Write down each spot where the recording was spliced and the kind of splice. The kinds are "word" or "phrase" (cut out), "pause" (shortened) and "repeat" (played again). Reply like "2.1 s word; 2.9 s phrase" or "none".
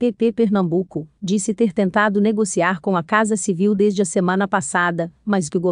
none